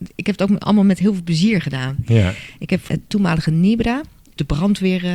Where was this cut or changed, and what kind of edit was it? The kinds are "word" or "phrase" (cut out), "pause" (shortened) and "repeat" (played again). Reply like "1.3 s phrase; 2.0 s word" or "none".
2.9 s word